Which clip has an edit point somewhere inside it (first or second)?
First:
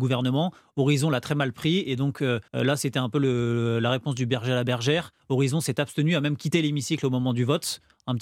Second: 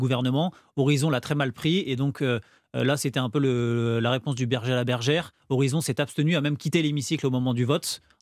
first